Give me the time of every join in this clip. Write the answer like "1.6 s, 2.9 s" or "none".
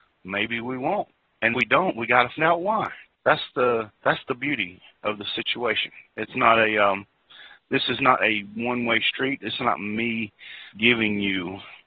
1.5 s, 2.4 s, 3.1 s, 4.0 s, 10.7 s

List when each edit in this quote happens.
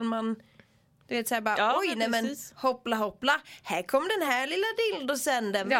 none

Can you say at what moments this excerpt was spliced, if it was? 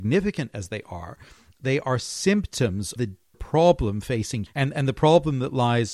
3.0 s, 3.3 s, 4.5 s

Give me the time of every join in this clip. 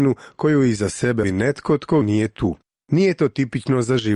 1.2 s, 2.0 s

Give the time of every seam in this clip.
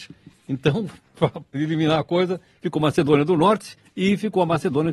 1.5 s

